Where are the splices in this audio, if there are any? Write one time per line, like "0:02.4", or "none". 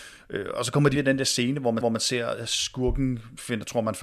0:00.9
0:01.8